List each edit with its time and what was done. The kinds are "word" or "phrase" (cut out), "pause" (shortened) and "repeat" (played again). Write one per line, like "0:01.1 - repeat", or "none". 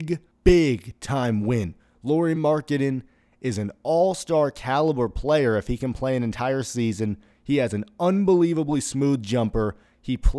none

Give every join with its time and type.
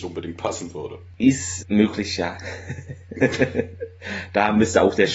0:01.6 - word

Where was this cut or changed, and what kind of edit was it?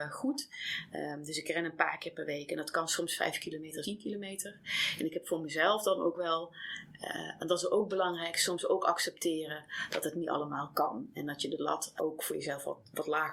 0:03.8 - phrase
0:12.0 - word

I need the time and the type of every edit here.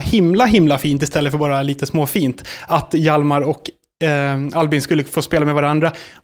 none

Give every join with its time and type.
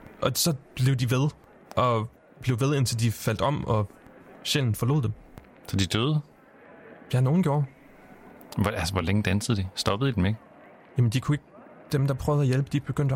none

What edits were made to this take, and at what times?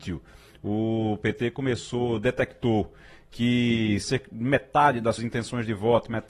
0:05.2 - word

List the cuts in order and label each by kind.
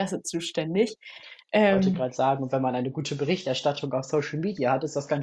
none

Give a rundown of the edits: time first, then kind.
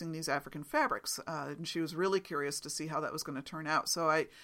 none

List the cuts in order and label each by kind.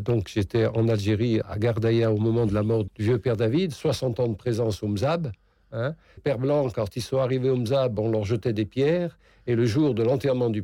0:01.4 - word
0:02.9 - word
0:06.2 - word

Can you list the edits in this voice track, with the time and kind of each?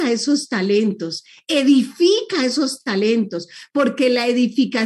none

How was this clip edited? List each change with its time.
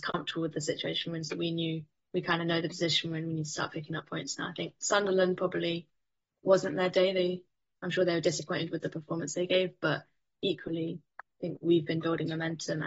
none

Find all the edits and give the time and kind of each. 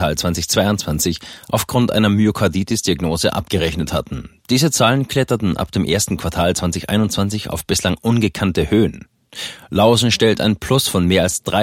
none

